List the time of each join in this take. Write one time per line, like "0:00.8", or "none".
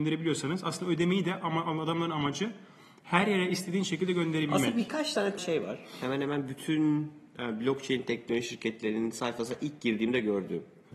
0:05.4